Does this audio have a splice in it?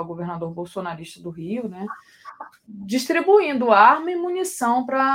no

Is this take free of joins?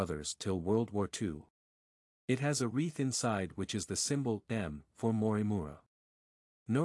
yes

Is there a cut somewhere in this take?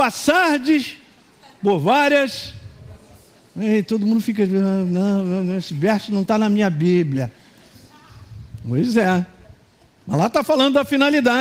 no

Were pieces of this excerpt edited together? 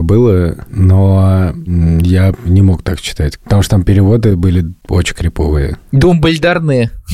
no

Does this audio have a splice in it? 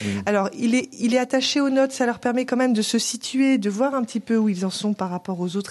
no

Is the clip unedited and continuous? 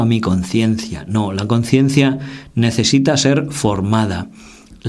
yes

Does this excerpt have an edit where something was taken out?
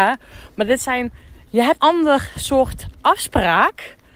yes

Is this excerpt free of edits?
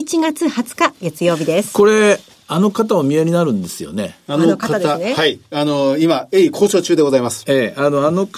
yes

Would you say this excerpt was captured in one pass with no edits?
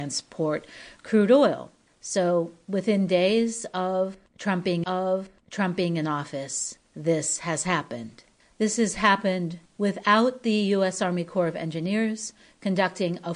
no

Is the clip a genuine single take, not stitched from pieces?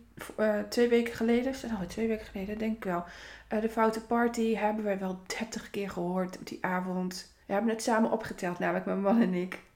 no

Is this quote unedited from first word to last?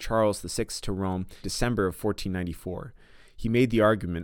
no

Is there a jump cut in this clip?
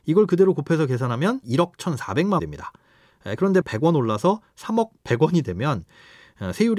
yes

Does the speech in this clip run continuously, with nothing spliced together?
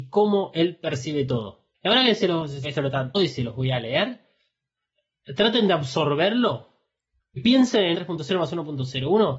no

